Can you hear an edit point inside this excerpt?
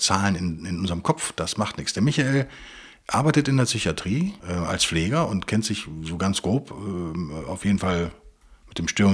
yes; 1 cut; at 4.4 s

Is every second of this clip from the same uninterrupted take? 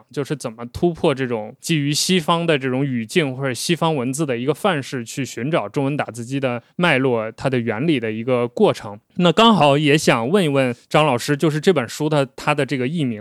yes; 0 cuts

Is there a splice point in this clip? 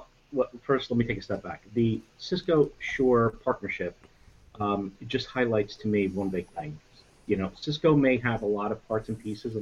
no; 0 cuts

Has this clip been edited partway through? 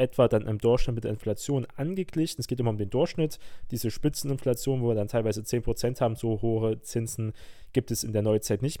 no; 0 cuts

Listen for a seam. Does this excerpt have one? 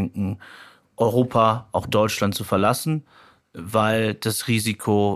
no; 0 cuts

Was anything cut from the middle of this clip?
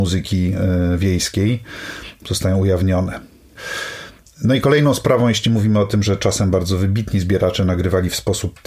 no; 0 cuts

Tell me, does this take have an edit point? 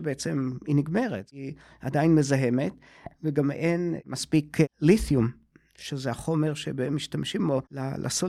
no; 0 cuts

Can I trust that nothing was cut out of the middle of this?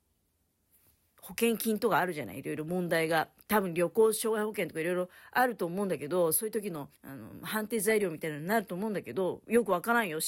no; 1 cut; at 6.9 s

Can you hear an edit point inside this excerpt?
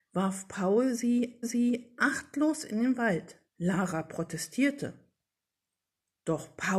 yes; 2 cuts; at 1.4 s, 3.5 s

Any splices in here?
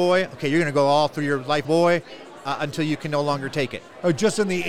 yes; 1 cut; at 1.6 s

